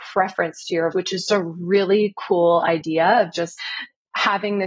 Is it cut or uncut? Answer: cut